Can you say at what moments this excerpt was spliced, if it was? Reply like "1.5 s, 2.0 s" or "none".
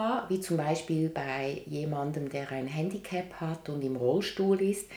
none